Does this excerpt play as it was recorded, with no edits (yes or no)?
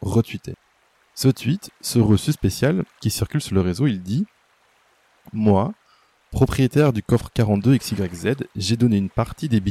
yes